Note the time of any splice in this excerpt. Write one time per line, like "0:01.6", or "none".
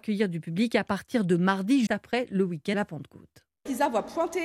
0:01.9
0:02.7